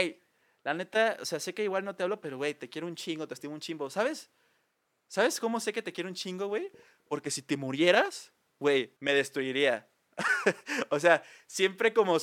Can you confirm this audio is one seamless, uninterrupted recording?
no; 1 cut; at 9.0 s

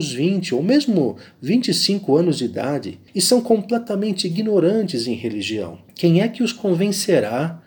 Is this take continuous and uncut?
no; 2 cuts; at 3.1 s, 5.9 s

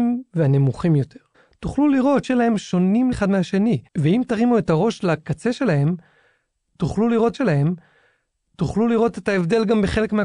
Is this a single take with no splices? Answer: no; 5 cuts; at 1.3 s, 2.2 s, 3.1 s, 3.9 s, 7.3 s

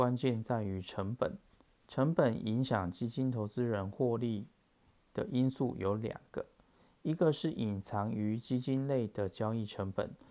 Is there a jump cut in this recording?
yes; 1 cut; at 1.6 s

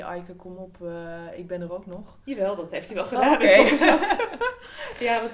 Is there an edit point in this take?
no; 0 cuts

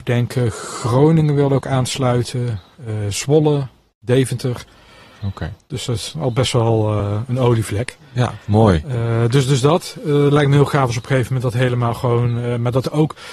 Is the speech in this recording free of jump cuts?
yes; 0 cuts

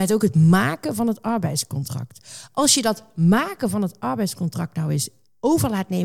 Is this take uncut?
yes; 0 cuts

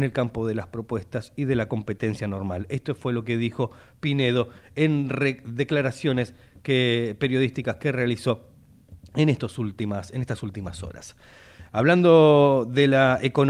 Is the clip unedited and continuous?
yes; 0 cuts

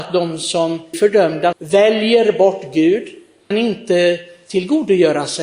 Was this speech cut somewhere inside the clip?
yes; 3 cuts; at 0.9 s, 1.5 s, 3.5 s

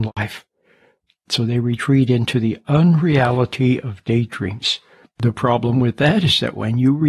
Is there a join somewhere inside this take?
no; 0 cuts

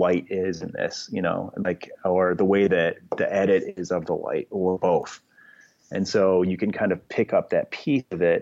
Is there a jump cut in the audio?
no; 0 cuts

